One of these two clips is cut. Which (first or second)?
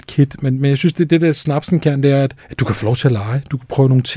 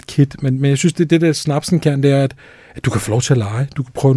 first